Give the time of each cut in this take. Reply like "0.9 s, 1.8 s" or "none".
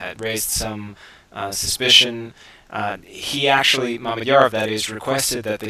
none